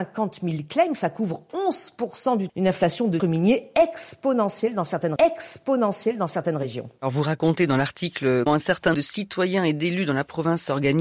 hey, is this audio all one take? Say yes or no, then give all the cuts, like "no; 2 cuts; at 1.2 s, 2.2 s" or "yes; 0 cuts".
no; 5 cuts; at 2.5 s, 3.2 s, 5.2 s, 8.5 s, 8.9 s